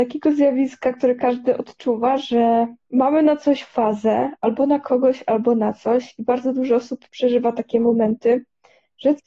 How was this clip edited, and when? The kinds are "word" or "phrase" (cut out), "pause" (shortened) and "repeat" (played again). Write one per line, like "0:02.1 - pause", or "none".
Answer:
0:07.1 - pause

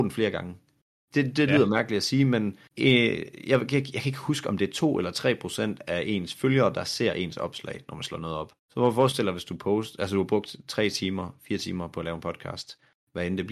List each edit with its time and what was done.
0:02.7 - pause
0:08.6 - pause

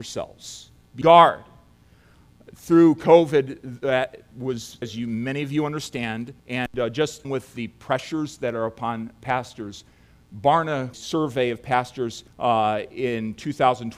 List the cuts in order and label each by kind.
0:01.0 - word
0:04.8 - word
0:06.4 - pause
0:07.2 - word
0:10.9 - phrase
0:12.3 - pause

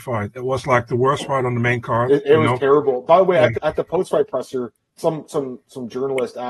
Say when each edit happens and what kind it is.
0:03.5 - word
0:05.0 - word

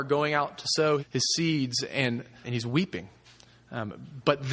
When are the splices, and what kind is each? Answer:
0:01.0 - word
0:02.4 - word

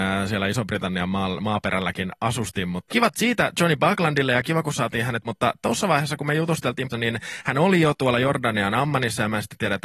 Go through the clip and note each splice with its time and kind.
0:02.9 - word
0:05.2 - word
0:06.9 - word

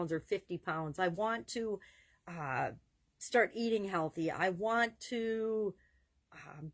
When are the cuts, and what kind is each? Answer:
none

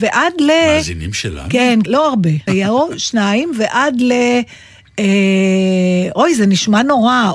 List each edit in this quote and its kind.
0:01.9 - word
0:02.5 - word

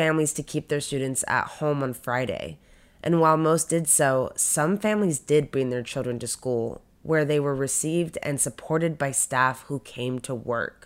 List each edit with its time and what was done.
none

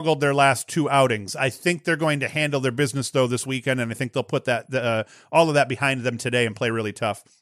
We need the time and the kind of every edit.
none

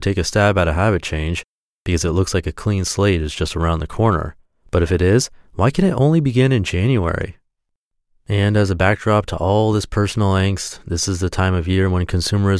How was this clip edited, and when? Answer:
none

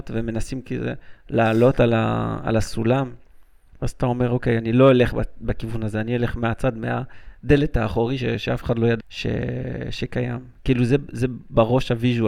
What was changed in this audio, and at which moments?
0:09.0 - word

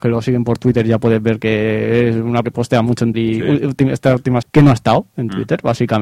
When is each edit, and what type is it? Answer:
0:02.4 - word
0:03.1 - word
0:04.4 - phrase

